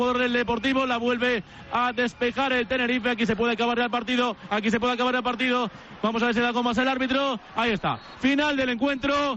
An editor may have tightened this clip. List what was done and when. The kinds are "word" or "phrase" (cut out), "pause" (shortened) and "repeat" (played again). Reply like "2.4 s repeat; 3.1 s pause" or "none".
8.1 s word